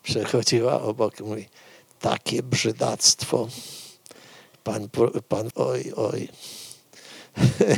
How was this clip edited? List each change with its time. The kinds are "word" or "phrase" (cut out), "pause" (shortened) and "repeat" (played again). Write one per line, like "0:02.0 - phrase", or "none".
0:05.5 - word

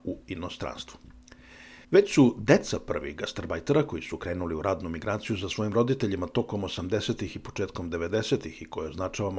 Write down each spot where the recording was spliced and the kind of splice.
0:01.8 - pause

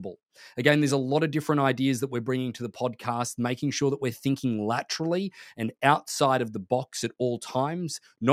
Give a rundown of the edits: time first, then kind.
none

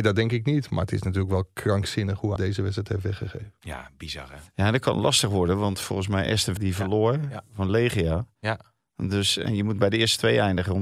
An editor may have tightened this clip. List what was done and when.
0:02.4 - word
0:06.6 - word

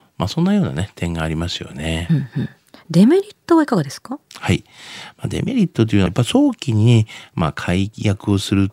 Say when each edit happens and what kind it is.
0:06.1 - phrase

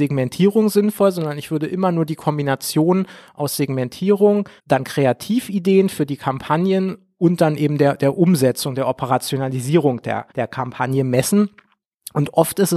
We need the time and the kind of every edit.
0:04.6 - pause
0:10.3 - pause

